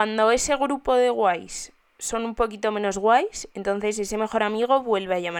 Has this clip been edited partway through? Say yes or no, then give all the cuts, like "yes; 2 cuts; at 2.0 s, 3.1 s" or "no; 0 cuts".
no; 0 cuts